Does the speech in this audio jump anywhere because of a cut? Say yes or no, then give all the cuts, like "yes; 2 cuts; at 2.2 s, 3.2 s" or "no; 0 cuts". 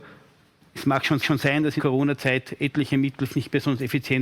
yes; 3 cuts; at 1.2 s, 1.8 s, 3.3 s